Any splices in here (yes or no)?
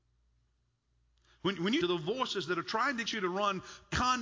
yes